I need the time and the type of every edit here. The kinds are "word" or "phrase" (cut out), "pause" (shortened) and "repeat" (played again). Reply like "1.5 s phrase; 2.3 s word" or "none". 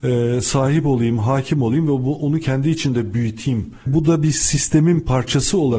3.9 s word